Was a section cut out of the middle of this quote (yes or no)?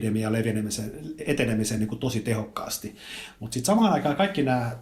no